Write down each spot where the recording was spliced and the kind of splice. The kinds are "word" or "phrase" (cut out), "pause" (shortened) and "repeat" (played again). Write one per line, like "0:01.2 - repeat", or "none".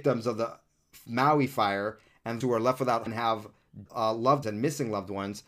0:02.4 - word
0:03.1 - word
0:03.9 - word
0:04.4 - word